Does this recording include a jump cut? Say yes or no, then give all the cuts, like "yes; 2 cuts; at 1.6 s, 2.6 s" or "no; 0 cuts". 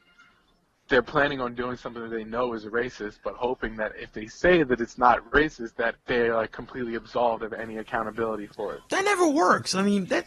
yes; 2 cuts; at 6.0 s, 8.9 s